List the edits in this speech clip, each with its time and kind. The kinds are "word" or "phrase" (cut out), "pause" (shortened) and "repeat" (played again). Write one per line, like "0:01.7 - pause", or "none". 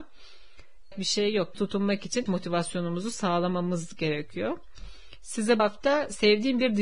0:00.9 - word
0:01.5 - phrase
0:02.3 - word
0:05.6 - word